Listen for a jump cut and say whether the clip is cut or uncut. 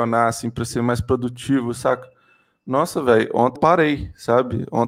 cut